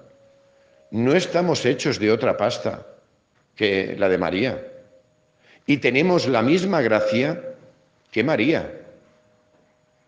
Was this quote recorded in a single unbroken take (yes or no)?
yes